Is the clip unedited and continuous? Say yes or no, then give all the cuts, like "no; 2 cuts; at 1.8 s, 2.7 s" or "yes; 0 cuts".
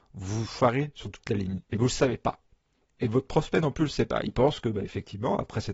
yes; 0 cuts